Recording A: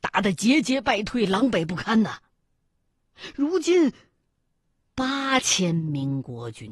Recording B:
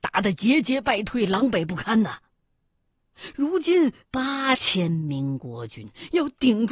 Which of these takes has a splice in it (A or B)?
B